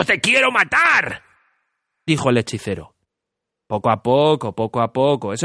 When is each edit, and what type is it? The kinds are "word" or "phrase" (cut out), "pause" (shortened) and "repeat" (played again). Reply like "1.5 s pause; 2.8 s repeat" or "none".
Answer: none